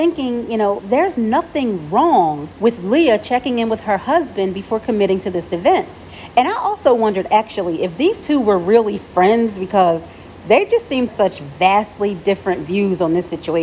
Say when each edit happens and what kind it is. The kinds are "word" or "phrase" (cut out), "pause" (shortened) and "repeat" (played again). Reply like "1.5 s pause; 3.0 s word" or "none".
2.5 s pause; 11.1 s phrase